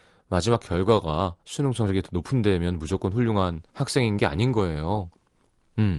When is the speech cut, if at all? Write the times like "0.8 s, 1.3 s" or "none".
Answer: 1.4 s, 3.7 s